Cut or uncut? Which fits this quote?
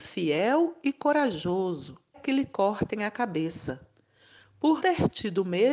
cut